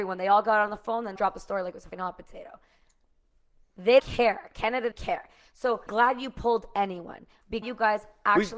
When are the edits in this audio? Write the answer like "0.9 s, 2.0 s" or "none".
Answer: 1.2 s, 1.9 s, 4.0 s, 4.9 s, 5.9 s, 7.6 s